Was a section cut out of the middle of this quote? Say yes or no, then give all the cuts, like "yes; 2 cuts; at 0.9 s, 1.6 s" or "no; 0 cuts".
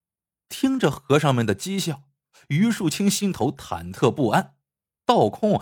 no; 0 cuts